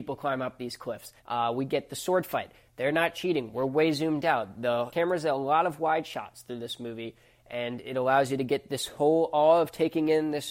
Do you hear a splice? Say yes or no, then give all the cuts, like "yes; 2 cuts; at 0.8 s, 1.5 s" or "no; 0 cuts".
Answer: yes; 1 cut; at 1.2 s